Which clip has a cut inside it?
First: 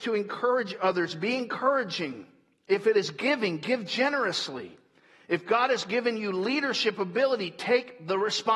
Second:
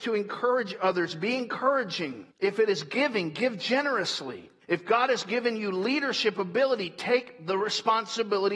second; 2 cuts; at 2.3 s, 4.6 s

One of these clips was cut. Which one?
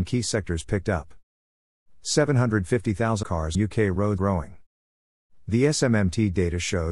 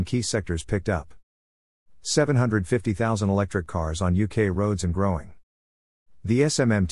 first; 3 cuts; at 3.2 s, 3.5 s, 4.2 s

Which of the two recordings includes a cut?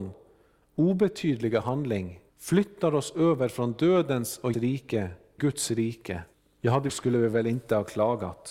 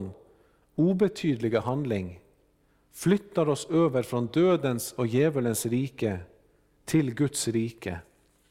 first; 5 cuts; at 2.3 s, 4.5 s, 5.4 s, 6.3 s, 6.9 s

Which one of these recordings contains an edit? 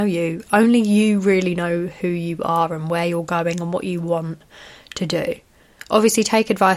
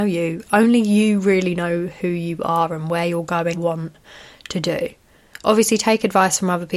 second; 1 cut; at 3.5 s

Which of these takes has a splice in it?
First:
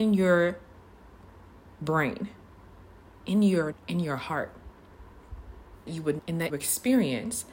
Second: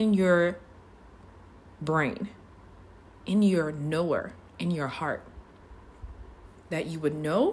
first; 4 cuts; at 3.7 s, 5.9 s, 6.2 s, 6.5 s

